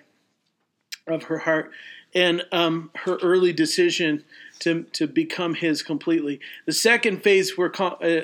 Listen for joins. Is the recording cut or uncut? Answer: uncut